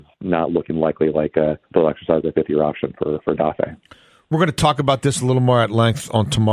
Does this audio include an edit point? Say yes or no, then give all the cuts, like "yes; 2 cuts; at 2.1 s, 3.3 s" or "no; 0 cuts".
yes; 1 cut; at 1.6 s